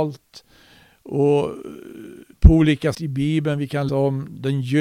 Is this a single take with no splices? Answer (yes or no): no